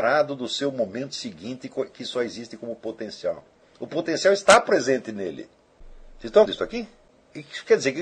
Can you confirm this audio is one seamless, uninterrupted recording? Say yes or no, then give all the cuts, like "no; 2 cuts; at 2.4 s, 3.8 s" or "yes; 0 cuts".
no; 1 cut; at 6.5 s